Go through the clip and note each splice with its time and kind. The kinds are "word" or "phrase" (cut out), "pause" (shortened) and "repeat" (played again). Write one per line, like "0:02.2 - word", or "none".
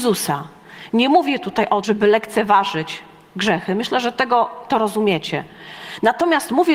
0:01.8 - word